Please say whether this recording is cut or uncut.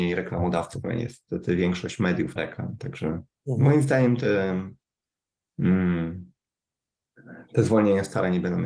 cut